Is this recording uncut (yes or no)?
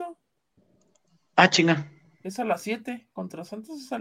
yes